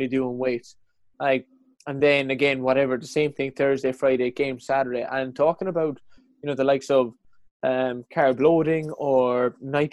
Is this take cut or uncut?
uncut